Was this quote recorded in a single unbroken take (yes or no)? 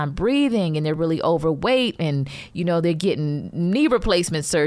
yes